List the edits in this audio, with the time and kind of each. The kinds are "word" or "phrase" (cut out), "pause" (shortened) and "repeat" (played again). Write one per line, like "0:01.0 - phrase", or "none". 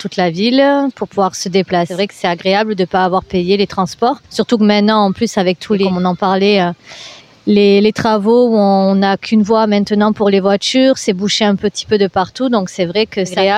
0:04.3 - pause
0:07.2 - pause